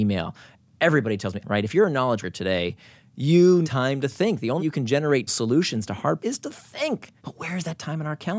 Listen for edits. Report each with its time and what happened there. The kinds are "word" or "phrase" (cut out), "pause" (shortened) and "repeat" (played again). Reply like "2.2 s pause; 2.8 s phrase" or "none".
1.4 s word; 2.2 s word; 3.6 s word; 4.6 s word; 5.3 s word; 6.2 s word; 7.2 s pause